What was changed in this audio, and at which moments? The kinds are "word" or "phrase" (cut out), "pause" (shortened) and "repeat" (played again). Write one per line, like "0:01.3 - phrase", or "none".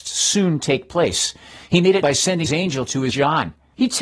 0:02.0 - word
0:02.5 - word
0:03.1 - word